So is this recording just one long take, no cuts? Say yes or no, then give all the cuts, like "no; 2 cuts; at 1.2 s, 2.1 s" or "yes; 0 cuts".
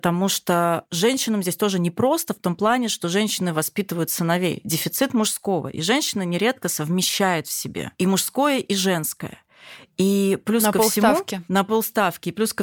yes; 0 cuts